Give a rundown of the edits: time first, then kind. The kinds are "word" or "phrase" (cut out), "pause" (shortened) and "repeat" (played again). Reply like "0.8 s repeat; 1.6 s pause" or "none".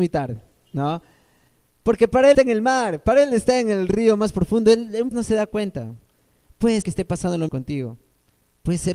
2.3 s word; 5.1 s word; 6.8 s word; 7.5 s word